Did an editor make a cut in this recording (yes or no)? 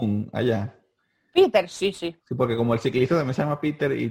yes